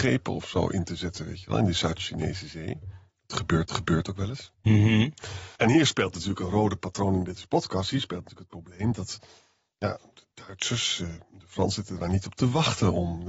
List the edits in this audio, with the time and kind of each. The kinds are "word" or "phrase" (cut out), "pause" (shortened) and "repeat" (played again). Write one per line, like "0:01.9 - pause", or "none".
0:03.7 - repeat
0:04.5 - pause
0:05.6 - pause